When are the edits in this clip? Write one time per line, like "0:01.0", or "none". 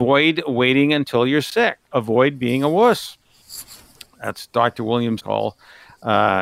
0:01.8
0:05.2